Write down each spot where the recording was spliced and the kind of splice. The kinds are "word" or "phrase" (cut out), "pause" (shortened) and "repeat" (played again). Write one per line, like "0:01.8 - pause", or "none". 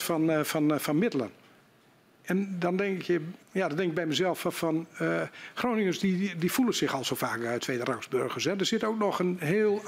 0:03.4 - pause